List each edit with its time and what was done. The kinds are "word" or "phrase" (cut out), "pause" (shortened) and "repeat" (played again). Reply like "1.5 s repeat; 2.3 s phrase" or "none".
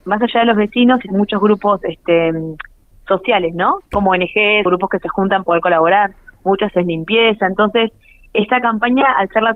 1.1 s word; 3.9 s word; 4.7 s word; 5.4 s word